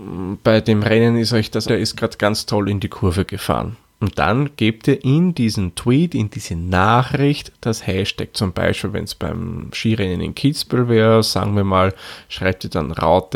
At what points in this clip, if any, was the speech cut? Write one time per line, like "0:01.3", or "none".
0:01.7